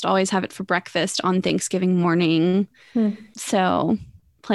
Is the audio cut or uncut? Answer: uncut